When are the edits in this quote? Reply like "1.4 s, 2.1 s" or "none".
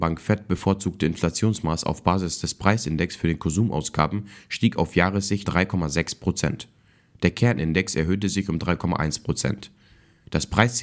5.4 s